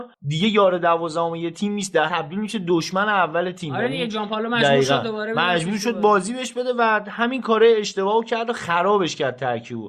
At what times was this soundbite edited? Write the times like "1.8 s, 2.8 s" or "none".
2.1 s